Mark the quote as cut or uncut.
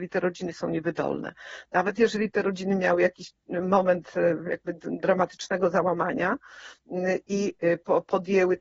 uncut